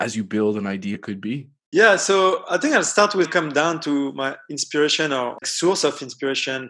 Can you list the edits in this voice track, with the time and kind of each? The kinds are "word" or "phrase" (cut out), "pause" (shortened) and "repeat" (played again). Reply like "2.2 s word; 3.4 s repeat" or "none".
0.9 s phrase; 3.2 s phrase; 5.4 s word